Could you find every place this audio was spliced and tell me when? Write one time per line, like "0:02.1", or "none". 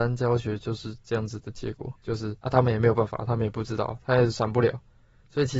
0:02.0
0:02.4